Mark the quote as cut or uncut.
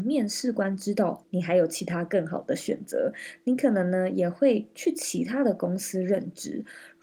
cut